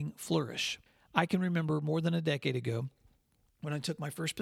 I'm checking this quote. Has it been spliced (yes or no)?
no